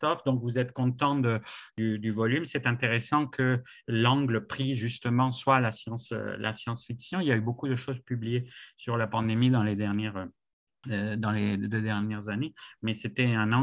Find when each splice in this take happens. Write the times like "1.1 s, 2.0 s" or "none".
none